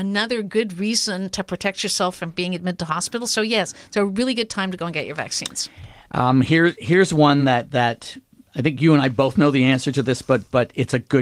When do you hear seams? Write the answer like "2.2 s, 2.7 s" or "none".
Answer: none